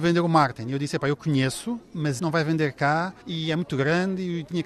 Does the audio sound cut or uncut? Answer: cut